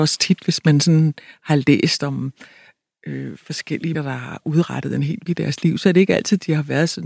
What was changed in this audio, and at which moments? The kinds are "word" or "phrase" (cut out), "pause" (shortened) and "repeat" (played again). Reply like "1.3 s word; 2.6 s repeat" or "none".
3.9 s word; 5.3 s word